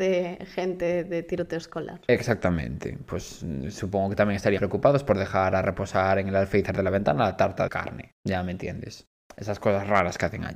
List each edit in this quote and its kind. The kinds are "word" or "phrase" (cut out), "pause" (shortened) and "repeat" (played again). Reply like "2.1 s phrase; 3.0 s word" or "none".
4.6 s word; 7.7 s word